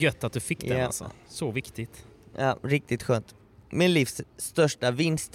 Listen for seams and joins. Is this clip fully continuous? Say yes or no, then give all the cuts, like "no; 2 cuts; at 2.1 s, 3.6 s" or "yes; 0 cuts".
yes; 0 cuts